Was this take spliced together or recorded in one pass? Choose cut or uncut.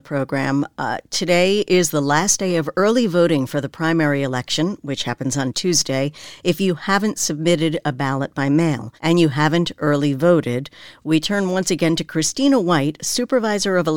cut